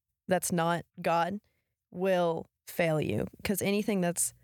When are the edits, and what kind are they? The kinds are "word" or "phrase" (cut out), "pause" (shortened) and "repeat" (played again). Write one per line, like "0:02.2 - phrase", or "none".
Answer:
0:00.9 - pause
0:02.6 - pause